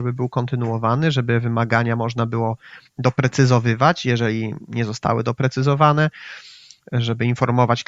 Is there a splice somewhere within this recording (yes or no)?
no